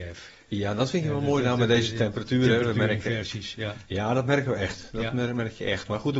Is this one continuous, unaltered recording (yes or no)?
yes